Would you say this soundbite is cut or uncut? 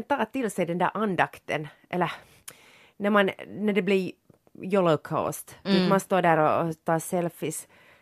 cut